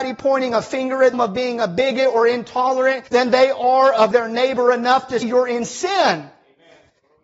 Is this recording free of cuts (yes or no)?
no